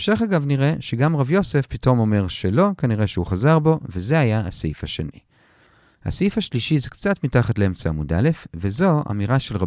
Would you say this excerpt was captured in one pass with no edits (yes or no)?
yes